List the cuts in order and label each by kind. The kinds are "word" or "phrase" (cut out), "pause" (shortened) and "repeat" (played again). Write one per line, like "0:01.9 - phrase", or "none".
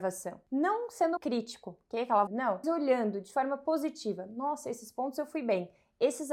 0:01.2 - word
0:02.3 - phrase
0:02.6 - word